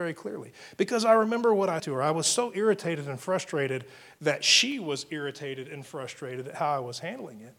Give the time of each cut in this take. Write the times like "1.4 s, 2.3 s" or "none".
1.8 s